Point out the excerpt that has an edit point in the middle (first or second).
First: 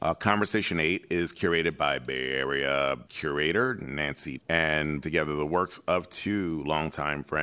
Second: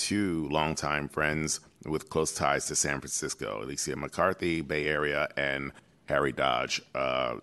first